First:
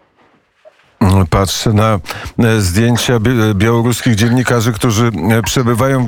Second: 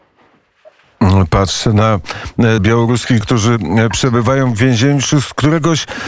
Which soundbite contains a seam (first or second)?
second